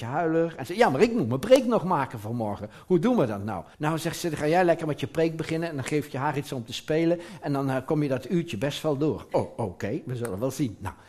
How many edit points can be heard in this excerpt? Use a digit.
1